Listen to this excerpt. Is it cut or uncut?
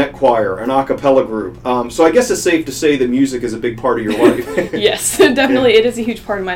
uncut